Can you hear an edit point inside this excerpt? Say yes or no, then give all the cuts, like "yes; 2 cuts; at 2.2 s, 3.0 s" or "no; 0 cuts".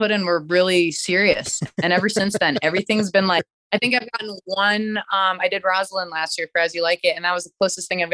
no; 0 cuts